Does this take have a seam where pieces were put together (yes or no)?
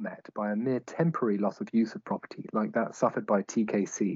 no